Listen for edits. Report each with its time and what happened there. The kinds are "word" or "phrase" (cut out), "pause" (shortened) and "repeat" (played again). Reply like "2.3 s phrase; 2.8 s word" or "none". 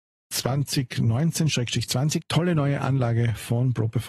2.2 s word